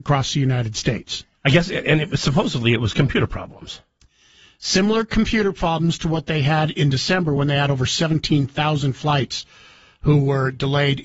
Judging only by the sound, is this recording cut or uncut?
uncut